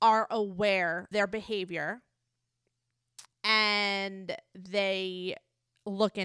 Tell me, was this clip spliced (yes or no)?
yes